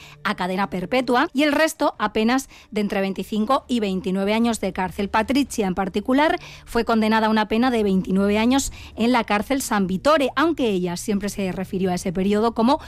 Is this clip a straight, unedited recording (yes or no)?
yes